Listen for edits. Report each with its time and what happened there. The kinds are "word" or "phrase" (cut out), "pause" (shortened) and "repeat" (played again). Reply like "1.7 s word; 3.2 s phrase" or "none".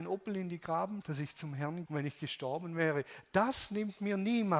1.0 s word; 1.9 s word